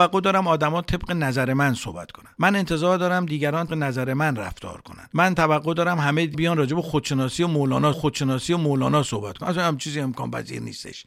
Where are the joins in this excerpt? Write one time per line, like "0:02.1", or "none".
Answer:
0:03.7
0:06.3
0:07.9